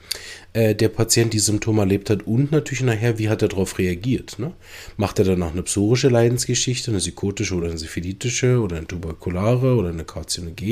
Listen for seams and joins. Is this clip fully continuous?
yes; 0 cuts

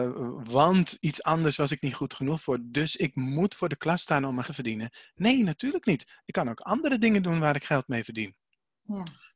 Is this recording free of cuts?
no; 1 cut; at 4.4 s

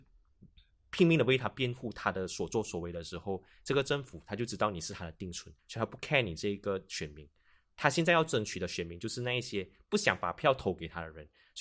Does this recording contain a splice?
yes; 1 cut; at 5.6 s

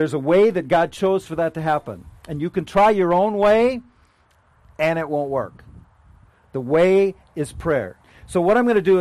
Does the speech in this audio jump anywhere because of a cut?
no; 0 cuts

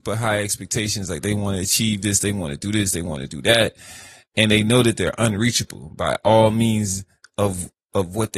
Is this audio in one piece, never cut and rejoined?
yes; 0 cuts

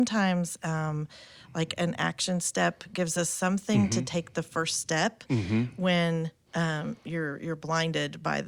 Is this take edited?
no; 0 cuts

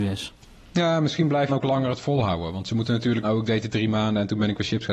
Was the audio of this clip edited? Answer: yes; 2 cuts; at 1.5 s, 3.2 s

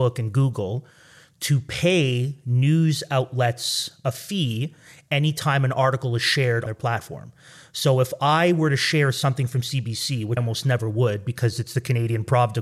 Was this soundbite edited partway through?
yes; 2 cuts; at 6.7 s, 10.4 s

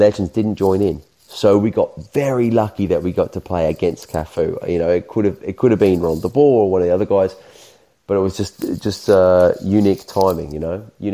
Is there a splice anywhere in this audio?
no; 0 cuts

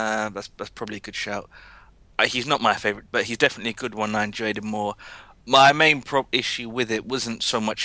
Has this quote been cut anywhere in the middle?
yes; 1 cut; at 3.1 s

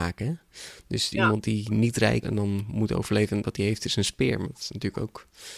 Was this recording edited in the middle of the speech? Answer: yes; 4 cuts; at 1.1 s, 2.2 s, 3.4 s, 4.4 s

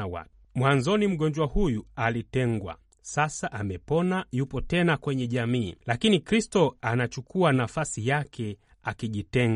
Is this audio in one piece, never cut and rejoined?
yes; 0 cuts

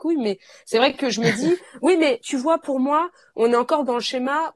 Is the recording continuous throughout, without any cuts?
yes; 0 cuts

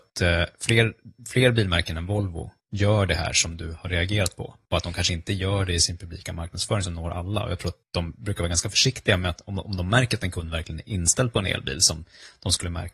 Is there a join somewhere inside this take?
no; 0 cuts

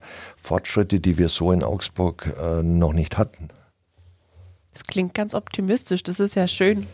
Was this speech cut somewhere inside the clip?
no; 0 cuts

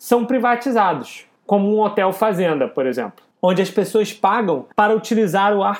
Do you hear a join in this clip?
yes; 3 cuts; at 1.4 s, 3.3 s, 4.7 s

